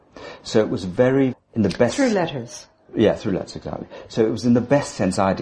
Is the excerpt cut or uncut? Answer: cut